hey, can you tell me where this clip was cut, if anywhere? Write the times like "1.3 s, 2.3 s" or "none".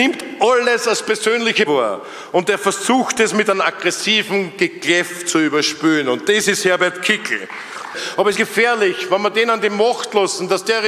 1.6 s, 8.3 s